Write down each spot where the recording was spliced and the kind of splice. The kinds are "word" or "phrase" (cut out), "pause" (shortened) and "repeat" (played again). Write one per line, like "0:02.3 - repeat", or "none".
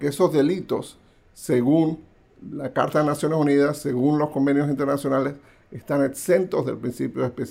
none